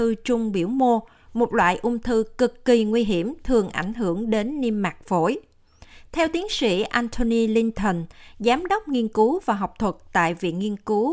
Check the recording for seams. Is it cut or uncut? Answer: uncut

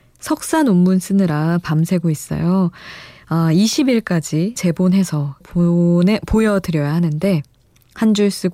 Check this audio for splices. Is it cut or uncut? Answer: cut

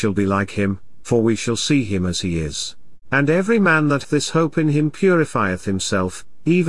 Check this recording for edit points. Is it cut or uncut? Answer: cut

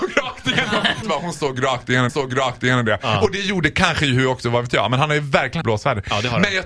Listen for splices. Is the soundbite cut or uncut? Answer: cut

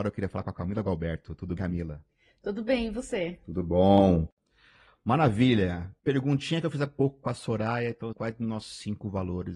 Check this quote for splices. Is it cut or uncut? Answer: cut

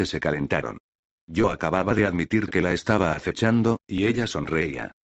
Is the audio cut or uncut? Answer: uncut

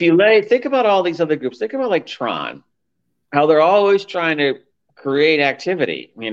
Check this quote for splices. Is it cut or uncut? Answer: uncut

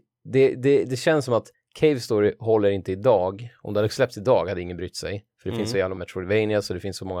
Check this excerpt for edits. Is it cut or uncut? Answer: cut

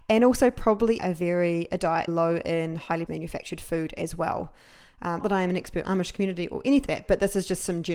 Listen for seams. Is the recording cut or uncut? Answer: cut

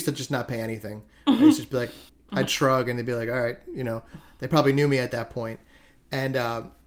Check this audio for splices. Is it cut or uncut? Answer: cut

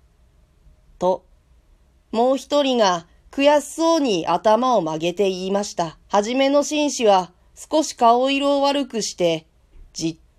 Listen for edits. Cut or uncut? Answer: cut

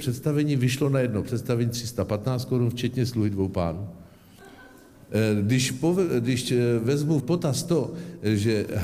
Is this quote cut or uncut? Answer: cut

